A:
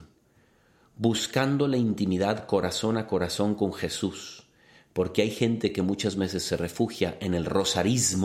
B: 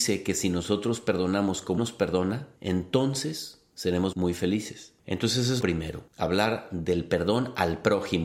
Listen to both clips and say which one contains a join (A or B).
B